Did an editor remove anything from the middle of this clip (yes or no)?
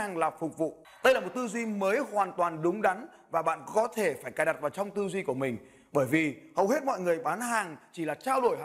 no